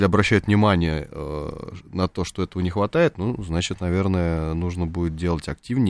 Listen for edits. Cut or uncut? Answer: uncut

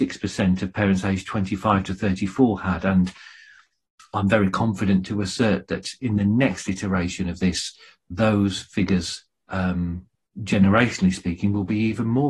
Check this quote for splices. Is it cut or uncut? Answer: cut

